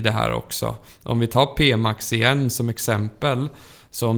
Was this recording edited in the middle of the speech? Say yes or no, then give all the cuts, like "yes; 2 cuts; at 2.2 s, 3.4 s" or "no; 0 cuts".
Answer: no; 0 cuts